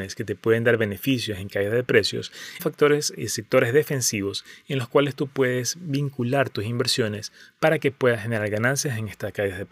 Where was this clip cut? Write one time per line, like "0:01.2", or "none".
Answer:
0:02.6